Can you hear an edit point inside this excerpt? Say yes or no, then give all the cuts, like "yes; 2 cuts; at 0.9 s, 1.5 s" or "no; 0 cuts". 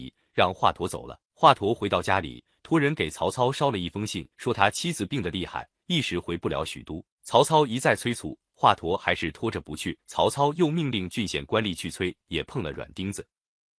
yes; 4 cuts; at 1.3 s, 4.3 s, 7.1 s, 10.0 s